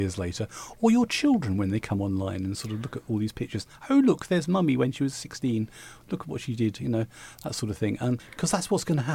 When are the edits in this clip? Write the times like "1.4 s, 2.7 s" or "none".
8.2 s